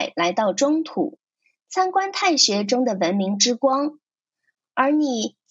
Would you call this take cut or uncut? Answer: uncut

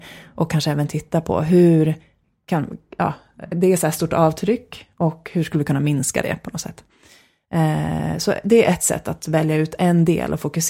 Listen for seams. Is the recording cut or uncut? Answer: uncut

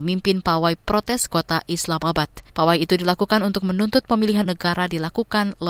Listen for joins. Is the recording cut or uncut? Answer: cut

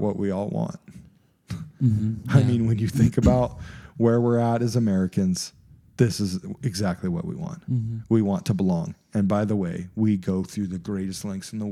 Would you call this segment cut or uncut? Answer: uncut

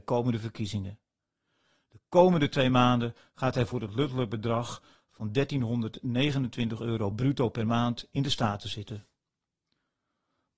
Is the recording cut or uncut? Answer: uncut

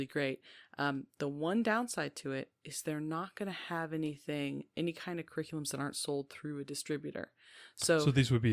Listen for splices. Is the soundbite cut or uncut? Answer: uncut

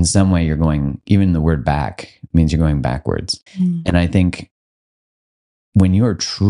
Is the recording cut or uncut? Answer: cut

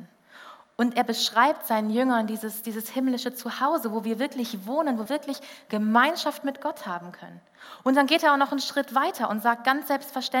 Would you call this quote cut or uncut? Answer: cut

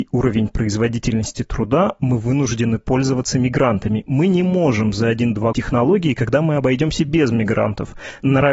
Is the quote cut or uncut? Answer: cut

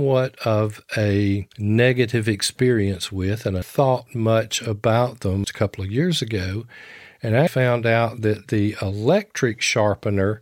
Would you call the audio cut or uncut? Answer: cut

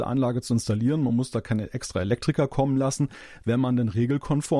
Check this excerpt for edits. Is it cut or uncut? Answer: uncut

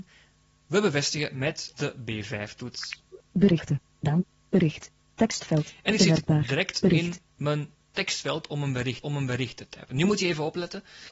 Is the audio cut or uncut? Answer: cut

